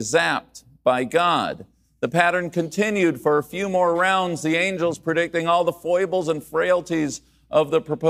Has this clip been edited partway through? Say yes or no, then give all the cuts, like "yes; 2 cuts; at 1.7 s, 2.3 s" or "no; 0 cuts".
no; 0 cuts